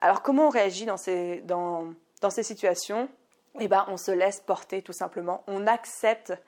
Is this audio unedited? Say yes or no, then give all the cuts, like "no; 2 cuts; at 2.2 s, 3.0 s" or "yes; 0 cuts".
yes; 0 cuts